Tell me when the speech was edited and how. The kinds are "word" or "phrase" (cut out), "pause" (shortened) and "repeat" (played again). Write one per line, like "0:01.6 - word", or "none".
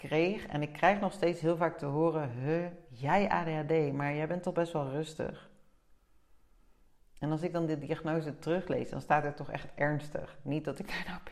none